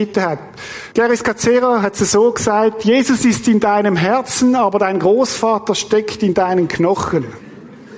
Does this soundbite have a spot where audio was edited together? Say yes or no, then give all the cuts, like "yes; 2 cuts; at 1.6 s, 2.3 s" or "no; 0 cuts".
yes; 1 cut; at 0.9 s